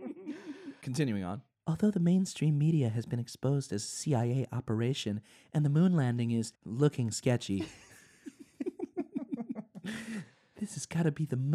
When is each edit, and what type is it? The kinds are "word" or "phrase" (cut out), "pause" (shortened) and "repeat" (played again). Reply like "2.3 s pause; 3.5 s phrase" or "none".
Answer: 6.6 s pause